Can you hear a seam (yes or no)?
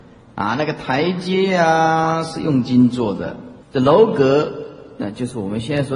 yes